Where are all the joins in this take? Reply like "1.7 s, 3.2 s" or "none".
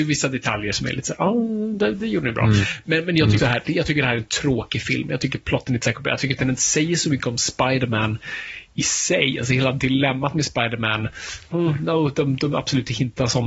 3.4 s, 11.5 s